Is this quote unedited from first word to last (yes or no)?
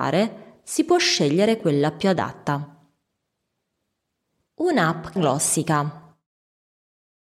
no